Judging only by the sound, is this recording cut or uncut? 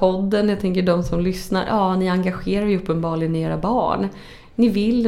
uncut